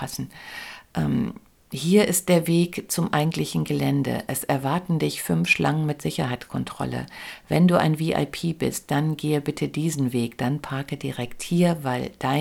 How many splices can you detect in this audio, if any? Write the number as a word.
zero